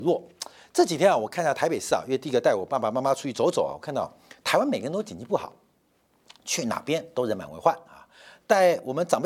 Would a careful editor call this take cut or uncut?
uncut